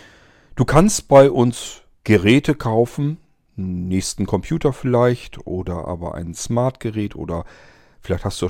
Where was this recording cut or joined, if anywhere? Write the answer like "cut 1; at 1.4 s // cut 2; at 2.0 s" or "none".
none